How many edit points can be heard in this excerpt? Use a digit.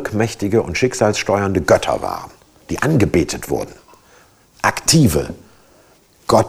0